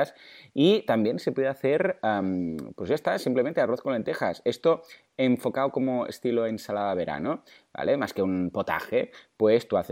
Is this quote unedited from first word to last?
yes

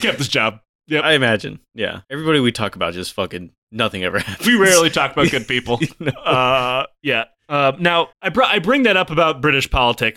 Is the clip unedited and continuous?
no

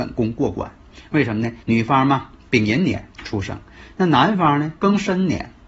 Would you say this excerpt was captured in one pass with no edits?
no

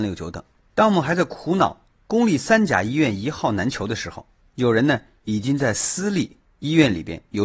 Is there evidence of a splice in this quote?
no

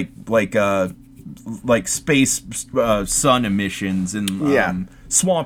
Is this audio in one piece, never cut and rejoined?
yes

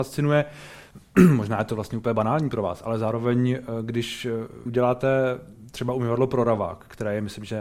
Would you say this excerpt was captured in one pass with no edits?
no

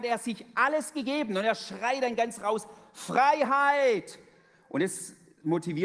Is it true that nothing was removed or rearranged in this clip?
yes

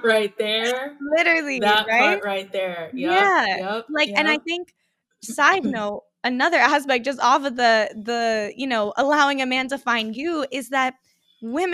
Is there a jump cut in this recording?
no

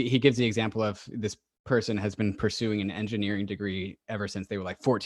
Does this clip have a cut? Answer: no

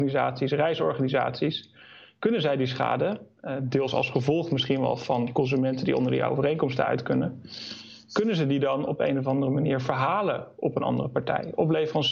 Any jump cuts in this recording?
no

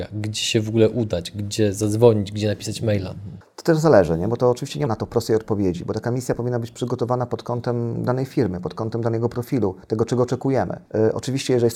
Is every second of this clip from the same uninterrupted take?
no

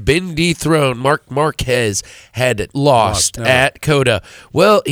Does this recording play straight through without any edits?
no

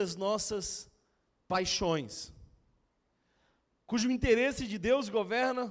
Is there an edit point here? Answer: no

